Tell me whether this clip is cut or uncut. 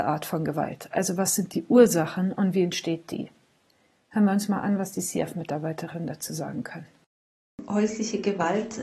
uncut